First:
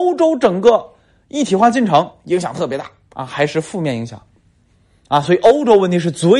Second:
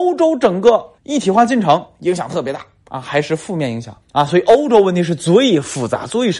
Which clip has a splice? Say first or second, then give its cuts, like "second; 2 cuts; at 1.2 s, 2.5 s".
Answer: second; 2 cuts; at 1.0 s, 4.0 s